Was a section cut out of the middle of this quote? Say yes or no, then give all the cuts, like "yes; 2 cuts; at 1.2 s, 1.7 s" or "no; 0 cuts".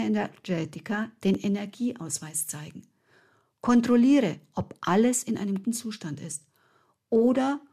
yes; 1 cut; at 5.6 s